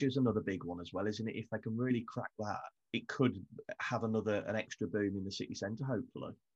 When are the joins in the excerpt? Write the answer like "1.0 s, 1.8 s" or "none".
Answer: 2.8 s